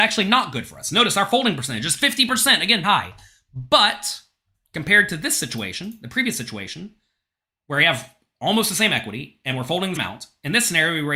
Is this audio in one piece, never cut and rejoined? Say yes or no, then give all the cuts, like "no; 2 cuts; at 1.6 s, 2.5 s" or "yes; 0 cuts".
no; 2 cuts; at 2.8 s, 10.0 s